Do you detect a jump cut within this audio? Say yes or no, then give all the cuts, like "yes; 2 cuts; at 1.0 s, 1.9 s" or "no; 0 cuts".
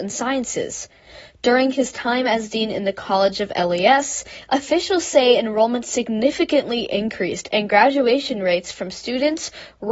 no; 0 cuts